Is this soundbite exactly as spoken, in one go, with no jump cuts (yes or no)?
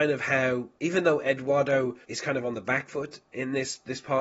no